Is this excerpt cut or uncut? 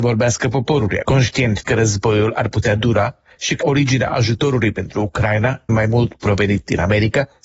cut